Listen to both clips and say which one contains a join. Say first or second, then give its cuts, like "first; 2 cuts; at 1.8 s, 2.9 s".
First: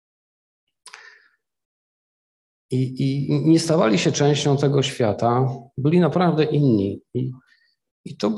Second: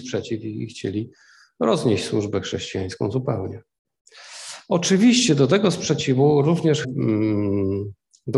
second; 1 cut; at 6.8 s